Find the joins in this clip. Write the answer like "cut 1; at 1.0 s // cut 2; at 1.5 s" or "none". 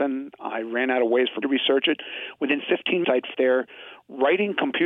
cut 1; at 1.4 s // cut 2; at 3.0 s // cut 3; at 3.3 s